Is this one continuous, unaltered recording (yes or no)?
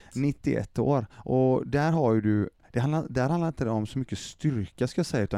yes